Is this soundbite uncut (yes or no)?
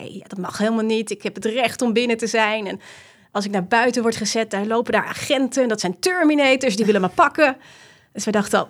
yes